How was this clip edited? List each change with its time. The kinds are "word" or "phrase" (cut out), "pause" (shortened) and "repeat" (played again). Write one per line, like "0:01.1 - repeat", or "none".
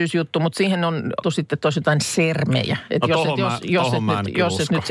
0:01.2 - word